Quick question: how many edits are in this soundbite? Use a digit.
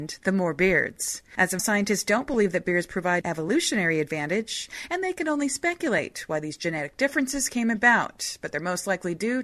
2